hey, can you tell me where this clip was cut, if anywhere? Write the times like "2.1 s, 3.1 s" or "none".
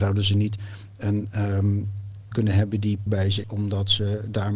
2.3 s, 3.1 s, 3.4 s